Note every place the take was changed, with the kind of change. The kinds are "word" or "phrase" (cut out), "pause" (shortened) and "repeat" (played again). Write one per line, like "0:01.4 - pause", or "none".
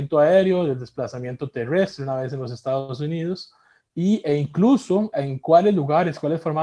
0:05.1 - word